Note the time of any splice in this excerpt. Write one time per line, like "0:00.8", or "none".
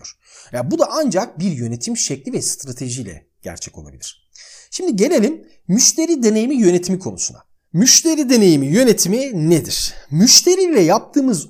none